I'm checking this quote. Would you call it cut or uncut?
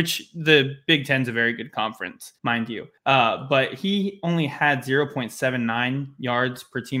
cut